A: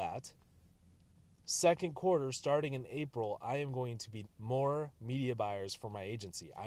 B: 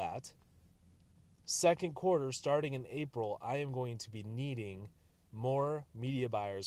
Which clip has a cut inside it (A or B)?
A